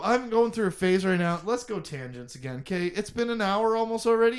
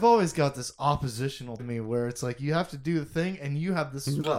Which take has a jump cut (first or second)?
second